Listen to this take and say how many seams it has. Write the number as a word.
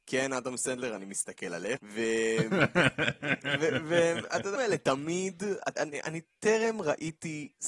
three